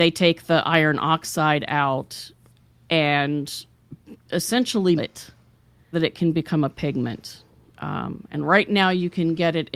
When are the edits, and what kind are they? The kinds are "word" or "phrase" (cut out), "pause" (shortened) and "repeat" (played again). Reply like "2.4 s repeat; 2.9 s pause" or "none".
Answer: 5.0 s word; 5.9 s word

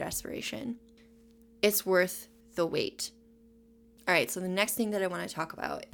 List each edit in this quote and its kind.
none

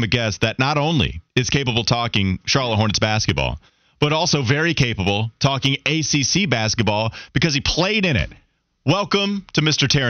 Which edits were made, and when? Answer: none

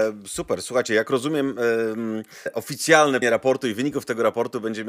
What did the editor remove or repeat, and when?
2.5 s word; 3.2 s word

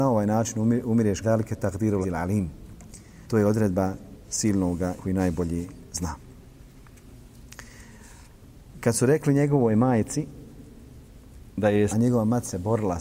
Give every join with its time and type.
1.2 s word; 2.0 s word; 3.2 s pause; 5.0 s phrase; 11.9 s phrase

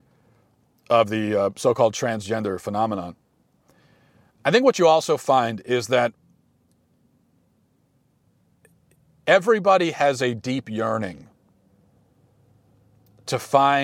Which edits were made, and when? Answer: none

